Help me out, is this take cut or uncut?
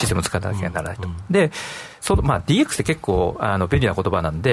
uncut